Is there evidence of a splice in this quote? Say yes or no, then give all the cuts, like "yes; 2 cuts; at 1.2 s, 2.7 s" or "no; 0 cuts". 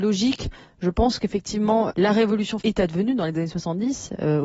yes; 2 cuts; at 1.9 s, 2.6 s